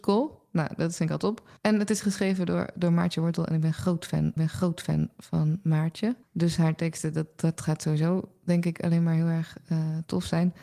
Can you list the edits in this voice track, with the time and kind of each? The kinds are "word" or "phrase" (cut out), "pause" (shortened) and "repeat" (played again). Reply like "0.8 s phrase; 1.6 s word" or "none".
1.6 s pause; 4.4 s repeat; 6.2 s pause